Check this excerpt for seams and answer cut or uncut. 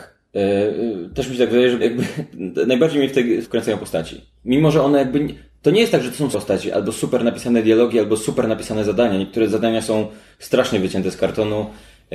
cut